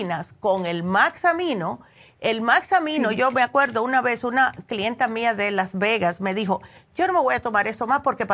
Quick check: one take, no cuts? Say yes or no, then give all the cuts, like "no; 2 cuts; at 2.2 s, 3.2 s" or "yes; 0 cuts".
yes; 0 cuts